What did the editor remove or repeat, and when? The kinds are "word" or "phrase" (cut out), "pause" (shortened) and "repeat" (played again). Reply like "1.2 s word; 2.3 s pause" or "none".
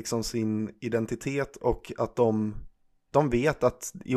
none